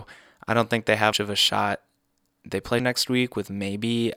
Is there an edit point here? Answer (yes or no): yes